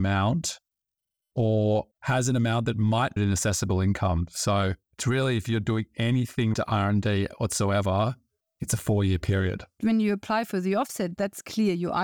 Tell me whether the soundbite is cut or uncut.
cut